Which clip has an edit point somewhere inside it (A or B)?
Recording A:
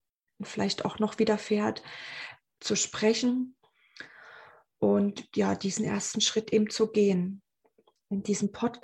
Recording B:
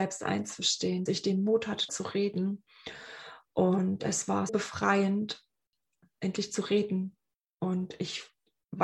B